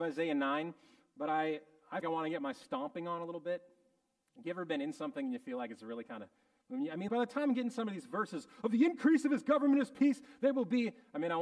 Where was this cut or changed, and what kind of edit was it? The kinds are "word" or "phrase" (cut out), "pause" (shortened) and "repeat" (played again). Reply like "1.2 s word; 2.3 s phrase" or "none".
2.0 s phrase; 7.1 s word